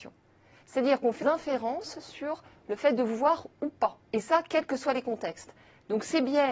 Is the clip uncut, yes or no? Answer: no